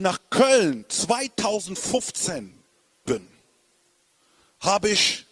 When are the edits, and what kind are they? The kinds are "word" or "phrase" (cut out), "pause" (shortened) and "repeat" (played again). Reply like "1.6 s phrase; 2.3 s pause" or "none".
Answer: 3.0 s word